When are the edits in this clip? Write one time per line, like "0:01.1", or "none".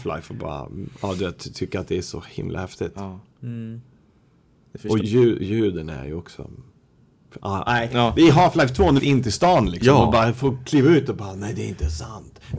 0:05.0
0:07.7
0:09.0

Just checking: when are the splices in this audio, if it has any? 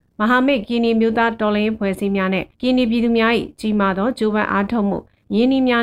0:02.5

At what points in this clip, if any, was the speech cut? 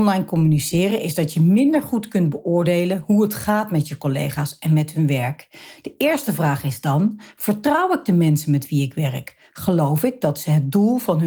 none

